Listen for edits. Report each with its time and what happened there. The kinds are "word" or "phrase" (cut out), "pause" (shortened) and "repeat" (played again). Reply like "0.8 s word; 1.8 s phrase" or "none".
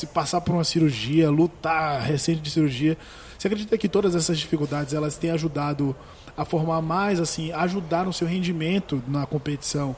none